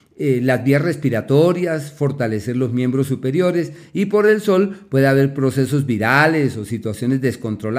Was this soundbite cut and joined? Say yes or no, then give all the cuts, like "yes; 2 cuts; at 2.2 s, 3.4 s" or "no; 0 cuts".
no; 0 cuts